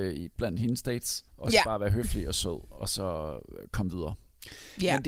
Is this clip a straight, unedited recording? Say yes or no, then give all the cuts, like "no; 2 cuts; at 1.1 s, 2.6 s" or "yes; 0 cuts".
no; 1 cut; at 1.3 s